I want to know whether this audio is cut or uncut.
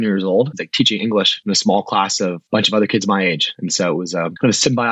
uncut